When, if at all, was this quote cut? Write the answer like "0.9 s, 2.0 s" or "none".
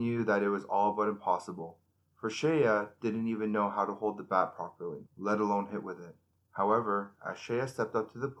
2.0 s, 5.1 s, 6.3 s